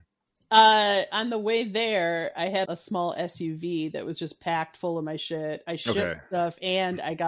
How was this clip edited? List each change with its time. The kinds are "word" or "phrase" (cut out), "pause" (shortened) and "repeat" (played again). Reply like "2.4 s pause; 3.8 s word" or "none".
2.6 s word